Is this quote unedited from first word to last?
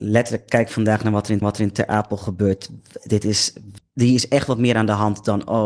no; 2 cuts; at 1.4 s, 3.8 s

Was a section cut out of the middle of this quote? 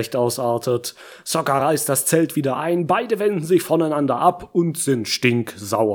no; 0 cuts

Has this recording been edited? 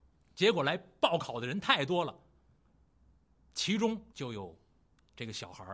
yes; 1 cut; at 4.1 s

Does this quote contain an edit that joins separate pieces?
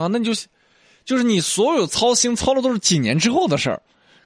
no; 0 cuts

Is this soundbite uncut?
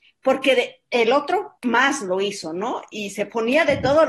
no; 1 cut; at 1.6 s

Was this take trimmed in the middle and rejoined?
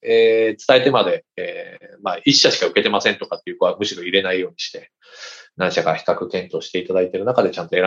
no; 0 cuts

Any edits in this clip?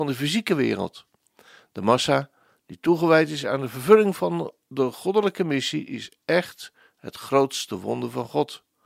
no; 0 cuts

